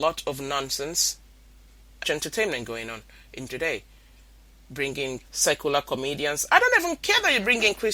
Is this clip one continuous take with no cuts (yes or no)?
no